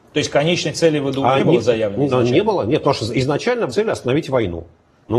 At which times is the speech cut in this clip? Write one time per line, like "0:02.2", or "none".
0:01.4
0:03.7